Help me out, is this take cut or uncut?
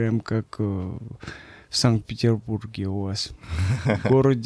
uncut